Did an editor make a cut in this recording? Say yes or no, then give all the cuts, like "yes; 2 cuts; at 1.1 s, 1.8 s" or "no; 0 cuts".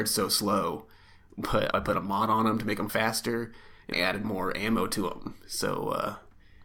yes; 3 cuts; at 1.7 s, 2.9 s, 3.9 s